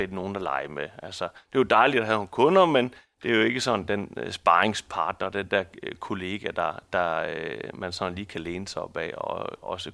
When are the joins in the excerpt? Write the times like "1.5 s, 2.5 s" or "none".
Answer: 1.4 s